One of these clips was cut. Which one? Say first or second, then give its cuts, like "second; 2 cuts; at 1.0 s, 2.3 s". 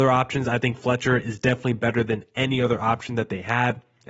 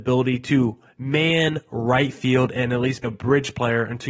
second; 1 cut; at 3.0 s